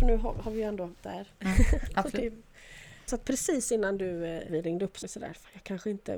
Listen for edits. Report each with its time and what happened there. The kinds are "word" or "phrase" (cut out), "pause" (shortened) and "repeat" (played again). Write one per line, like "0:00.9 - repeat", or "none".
0:01.0 - word
0:03.1 - word
0:04.5 - word
0:05.0 - word